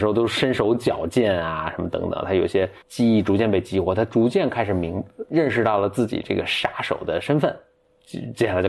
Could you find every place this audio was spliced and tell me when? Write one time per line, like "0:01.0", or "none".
0:02.8